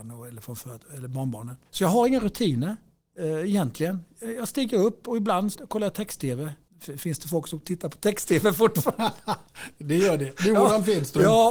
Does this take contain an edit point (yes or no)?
yes